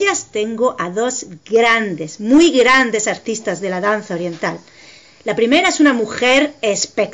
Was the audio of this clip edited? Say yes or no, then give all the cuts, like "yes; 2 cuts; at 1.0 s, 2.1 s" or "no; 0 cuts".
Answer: no; 0 cuts